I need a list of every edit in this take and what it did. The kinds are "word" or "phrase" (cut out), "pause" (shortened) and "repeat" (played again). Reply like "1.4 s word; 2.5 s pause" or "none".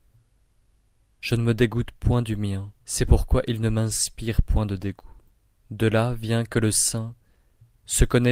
2.8 s pause; 5.3 s pause